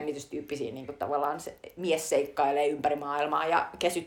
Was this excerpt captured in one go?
yes; 0 cuts

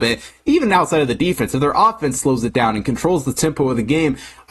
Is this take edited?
no; 0 cuts

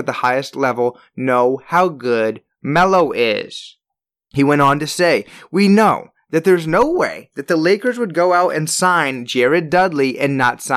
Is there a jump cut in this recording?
no; 0 cuts

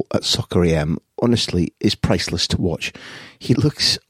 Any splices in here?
yes; 1 cut; at 1.7 s

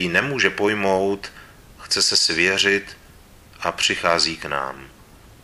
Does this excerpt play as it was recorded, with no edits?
yes; 0 cuts

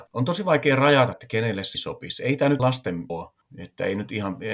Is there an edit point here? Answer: yes; 4 cuts; at 1.1 s, 1.7 s, 2.6 s, 3.1 s

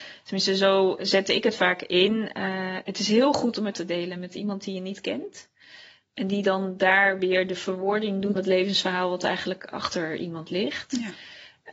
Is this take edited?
yes; 2 cuts; at 3.7 s, 8.4 s

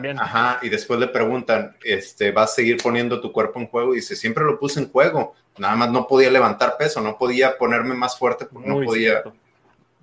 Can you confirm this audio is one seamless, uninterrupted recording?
yes; 0 cuts

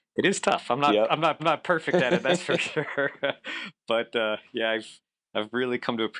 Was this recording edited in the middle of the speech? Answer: yes; 1 cut; at 1.4 s

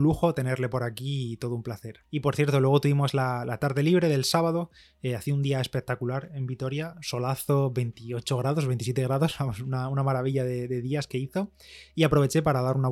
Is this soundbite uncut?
yes; 0 cuts

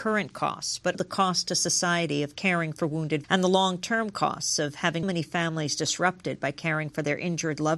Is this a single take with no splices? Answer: no; 3 cuts; at 0.9 s, 3.2 s, 5.0 s

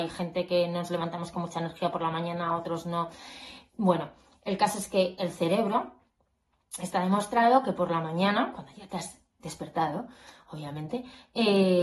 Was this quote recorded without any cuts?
yes; 0 cuts

